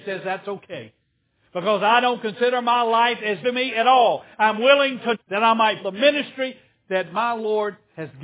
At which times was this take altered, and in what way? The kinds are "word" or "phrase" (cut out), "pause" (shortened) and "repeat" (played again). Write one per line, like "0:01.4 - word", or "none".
0:03.4 - word
0:05.1 - word
0:05.8 - word